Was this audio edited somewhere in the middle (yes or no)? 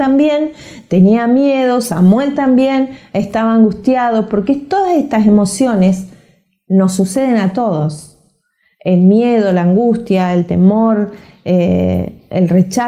no